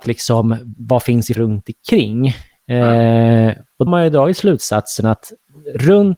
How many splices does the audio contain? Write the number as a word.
two